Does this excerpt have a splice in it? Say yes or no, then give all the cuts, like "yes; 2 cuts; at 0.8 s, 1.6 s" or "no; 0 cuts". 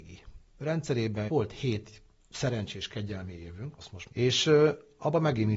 yes; 3 cuts; at 1.3 s, 3.8 s, 4.1 s